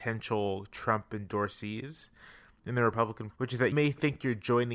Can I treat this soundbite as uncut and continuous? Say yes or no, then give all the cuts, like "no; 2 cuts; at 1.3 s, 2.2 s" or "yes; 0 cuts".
no; 2 cuts; at 3.3 s, 3.7 s